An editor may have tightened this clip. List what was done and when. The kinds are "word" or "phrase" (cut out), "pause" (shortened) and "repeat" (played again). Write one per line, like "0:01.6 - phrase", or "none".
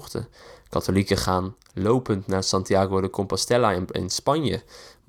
none